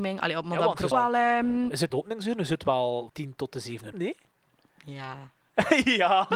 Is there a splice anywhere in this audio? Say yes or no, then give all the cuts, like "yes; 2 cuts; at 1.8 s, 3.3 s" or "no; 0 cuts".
yes; 4 cuts; at 0.9 s, 1.9 s, 3.1 s, 3.9 s